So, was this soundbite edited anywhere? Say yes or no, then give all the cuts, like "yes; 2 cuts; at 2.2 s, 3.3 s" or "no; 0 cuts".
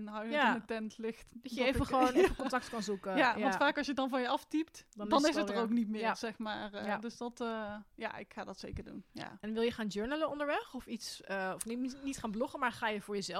yes; 1 cut; at 4.9 s